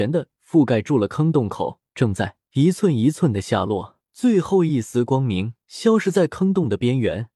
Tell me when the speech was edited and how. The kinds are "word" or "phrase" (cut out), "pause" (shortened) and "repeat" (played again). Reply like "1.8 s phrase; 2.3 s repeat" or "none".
1.9 s pause; 2.4 s pause; 4.0 s pause; 5.6 s pause